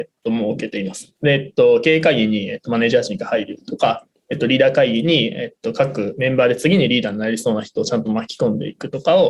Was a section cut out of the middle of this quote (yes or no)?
yes